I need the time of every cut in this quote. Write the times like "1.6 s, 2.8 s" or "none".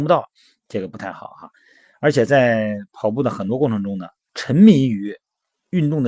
4.3 s